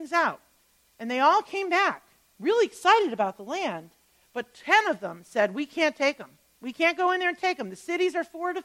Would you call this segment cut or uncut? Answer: uncut